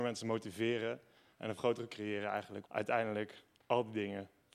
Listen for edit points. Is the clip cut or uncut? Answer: cut